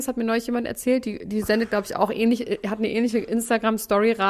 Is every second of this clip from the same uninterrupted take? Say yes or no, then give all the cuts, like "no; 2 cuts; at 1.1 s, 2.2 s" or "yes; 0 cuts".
yes; 0 cuts